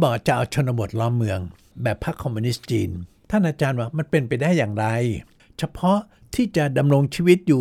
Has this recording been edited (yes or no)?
no